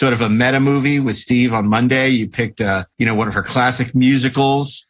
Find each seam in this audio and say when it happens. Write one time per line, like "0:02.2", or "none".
0:02.9